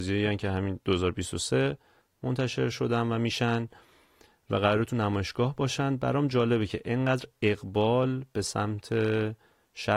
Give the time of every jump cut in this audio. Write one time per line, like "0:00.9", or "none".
none